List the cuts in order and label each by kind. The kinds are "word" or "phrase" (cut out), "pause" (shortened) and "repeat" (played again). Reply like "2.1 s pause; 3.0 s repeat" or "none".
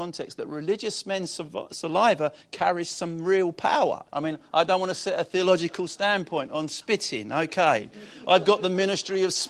4.1 s pause